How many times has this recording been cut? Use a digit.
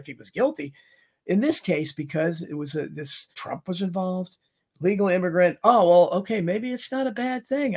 1